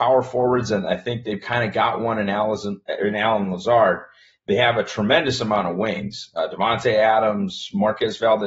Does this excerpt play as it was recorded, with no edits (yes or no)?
yes